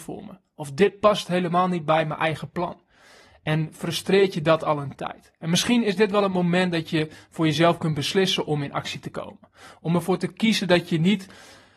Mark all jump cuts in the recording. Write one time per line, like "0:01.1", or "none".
none